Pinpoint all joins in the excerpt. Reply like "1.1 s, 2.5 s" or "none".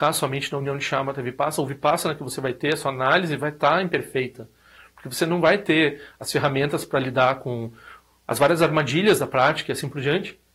none